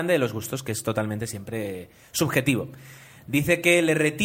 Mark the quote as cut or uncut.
uncut